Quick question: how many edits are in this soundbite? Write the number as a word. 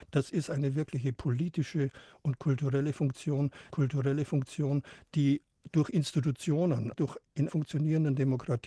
three